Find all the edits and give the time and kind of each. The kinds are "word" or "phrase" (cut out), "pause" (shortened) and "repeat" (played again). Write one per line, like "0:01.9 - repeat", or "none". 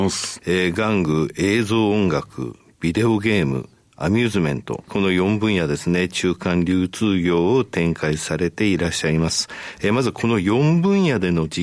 none